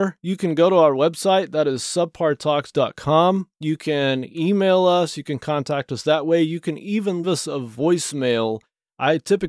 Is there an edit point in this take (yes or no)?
yes